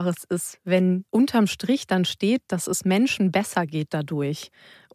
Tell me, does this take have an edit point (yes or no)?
yes